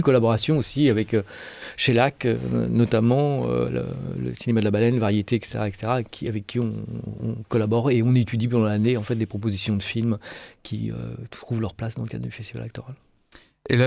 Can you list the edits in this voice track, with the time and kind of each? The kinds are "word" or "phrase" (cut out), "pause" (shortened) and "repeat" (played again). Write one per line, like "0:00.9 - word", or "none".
none

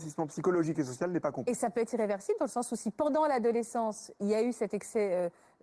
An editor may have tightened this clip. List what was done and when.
none

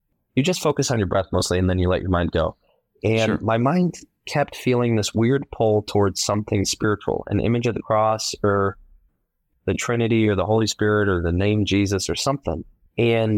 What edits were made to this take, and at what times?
none

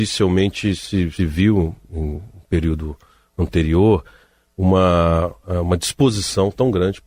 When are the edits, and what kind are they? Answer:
none

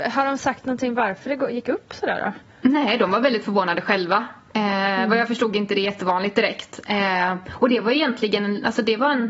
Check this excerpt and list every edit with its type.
none

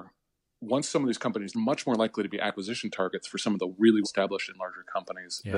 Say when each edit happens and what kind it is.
0:01.5 - phrase
0:04.0 - word

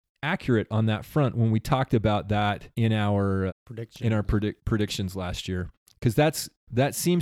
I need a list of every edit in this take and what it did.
0:02.7 - pause
0:03.5 - word
0:04.6 - pause

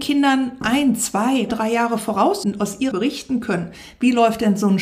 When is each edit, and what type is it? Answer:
0:01.5 - word
0:02.4 - word
0:02.9 - word

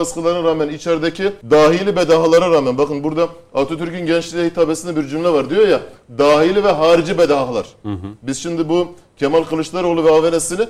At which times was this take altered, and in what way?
0:01.4 - pause

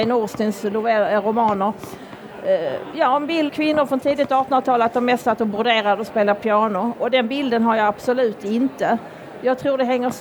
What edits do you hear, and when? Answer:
0:03.5 - word

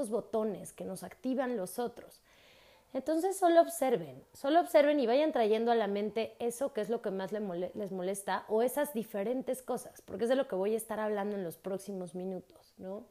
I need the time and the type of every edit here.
none

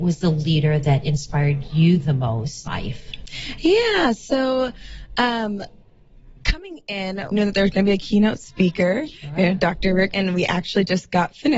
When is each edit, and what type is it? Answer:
0:02.7 - word
0:07.3 - word
0:10.1 - word

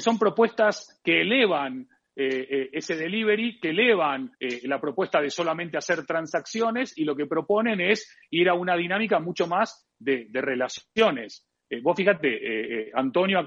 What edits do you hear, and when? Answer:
0:04.3 - pause

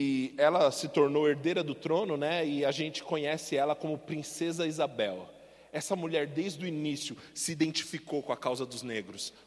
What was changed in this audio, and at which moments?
none

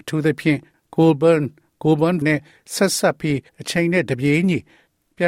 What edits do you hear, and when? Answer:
0:02.2 - word
0:03.5 - pause

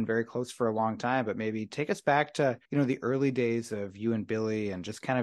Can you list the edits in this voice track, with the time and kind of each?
0:02.6 - pause

